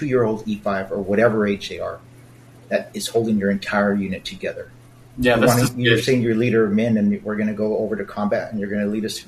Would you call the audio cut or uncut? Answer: uncut